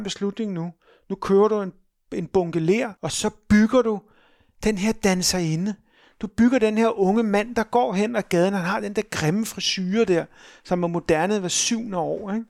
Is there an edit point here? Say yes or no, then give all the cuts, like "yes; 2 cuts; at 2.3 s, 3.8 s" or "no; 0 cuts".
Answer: yes; 1 cut; at 3.0 s